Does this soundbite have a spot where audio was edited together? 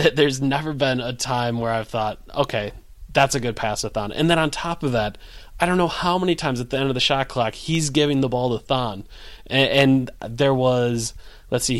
no; 0 cuts

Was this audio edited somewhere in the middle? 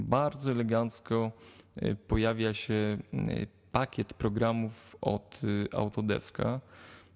no; 0 cuts

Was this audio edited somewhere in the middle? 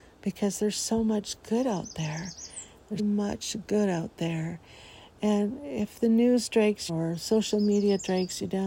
yes; 2 cuts; at 3.0 s, 6.9 s

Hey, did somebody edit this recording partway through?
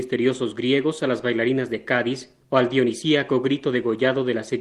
no; 0 cuts

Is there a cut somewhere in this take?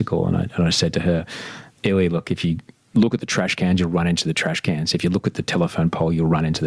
no; 0 cuts

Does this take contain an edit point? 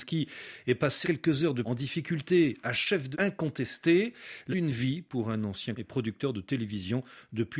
yes; 5 cuts; at 1.0 s, 1.6 s, 3.1 s, 4.5 s, 5.8 s

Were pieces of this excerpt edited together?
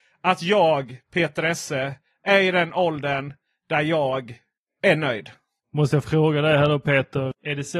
no; 0 cuts

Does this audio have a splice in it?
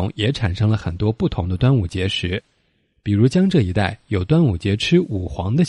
no; 0 cuts

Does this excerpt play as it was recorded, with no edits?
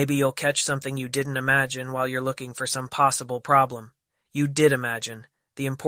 yes; 0 cuts

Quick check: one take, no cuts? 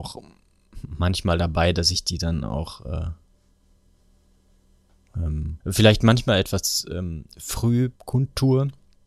no; 2 cuts; at 5.6 s, 8.0 s

